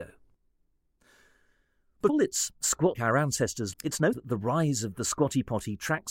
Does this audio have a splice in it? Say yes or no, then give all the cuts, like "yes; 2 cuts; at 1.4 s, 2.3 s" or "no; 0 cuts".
yes; 4 cuts; at 2.1 s, 2.9 s, 3.7 s, 4.1 s